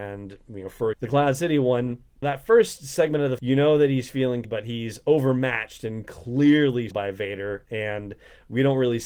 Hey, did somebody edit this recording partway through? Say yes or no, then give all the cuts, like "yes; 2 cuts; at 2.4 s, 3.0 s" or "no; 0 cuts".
yes; 5 cuts; at 0.9 s, 2.2 s, 3.4 s, 4.4 s, 6.9 s